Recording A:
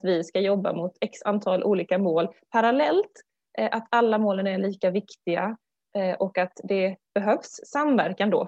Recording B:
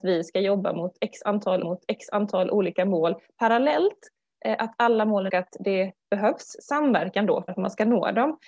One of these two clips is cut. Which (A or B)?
B